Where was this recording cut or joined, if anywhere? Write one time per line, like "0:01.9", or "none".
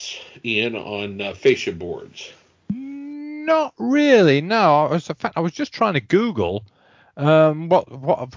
none